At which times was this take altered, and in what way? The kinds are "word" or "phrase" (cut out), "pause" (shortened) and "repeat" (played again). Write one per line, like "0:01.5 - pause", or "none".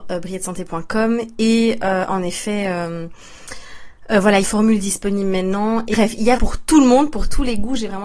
0:04.4 - phrase
0:06.4 - word